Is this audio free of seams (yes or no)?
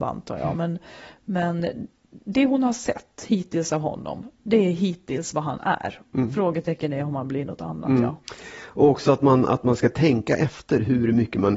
yes